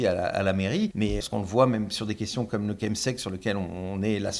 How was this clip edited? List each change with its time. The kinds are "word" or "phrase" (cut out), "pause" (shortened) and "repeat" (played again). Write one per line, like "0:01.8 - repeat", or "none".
0:01.2 - word